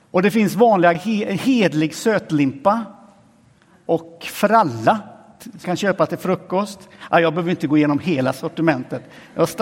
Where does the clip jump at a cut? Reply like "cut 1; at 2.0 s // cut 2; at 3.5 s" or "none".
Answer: cut 1; at 0.9 s // cut 2; at 5.6 s

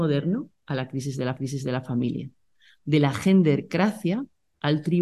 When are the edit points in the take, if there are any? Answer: cut 1; at 1.4 s

